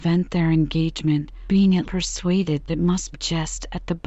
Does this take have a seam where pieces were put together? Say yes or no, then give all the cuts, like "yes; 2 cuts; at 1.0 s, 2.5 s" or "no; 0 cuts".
yes; 4 cuts; at 1.5 s, 1.8 s, 2.7 s, 3.1 s